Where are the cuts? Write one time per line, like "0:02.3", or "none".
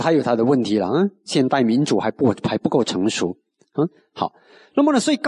none